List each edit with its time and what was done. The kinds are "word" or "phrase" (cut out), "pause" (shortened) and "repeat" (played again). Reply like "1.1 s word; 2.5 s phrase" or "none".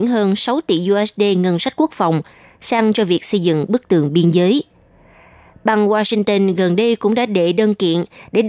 none